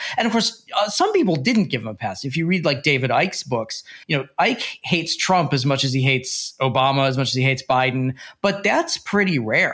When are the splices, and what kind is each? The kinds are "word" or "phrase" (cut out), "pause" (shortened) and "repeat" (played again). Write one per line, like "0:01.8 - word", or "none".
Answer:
0:04.0 - pause

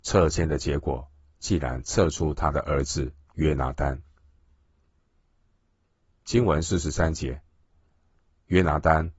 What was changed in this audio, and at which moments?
none

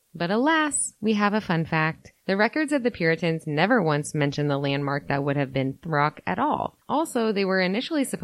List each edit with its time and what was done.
0:05.8 - word

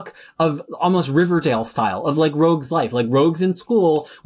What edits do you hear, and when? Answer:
none

